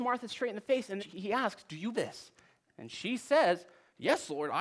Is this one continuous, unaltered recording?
no; 2 cuts; at 1.0 s, 1.9 s

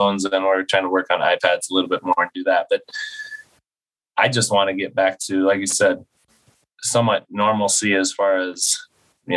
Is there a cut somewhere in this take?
no; 0 cuts

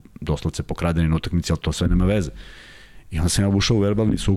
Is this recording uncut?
yes; 0 cuts

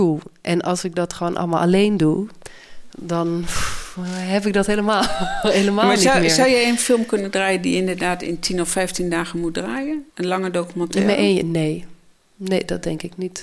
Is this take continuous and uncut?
no; 2 cuts; at 10.1 s, 12.1 s

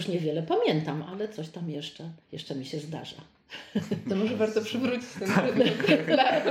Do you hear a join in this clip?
yes; 1 cut; at 2.2 s

